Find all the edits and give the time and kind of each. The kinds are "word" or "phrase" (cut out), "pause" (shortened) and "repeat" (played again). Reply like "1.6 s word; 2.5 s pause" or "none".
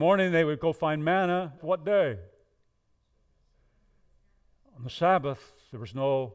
1.6 s word